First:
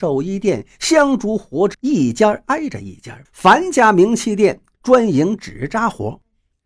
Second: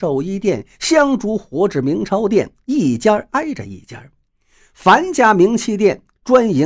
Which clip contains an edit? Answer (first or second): first